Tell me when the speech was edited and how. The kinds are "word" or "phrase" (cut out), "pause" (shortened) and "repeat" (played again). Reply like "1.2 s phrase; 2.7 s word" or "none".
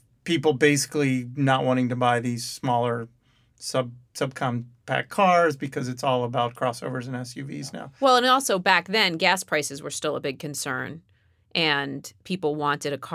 none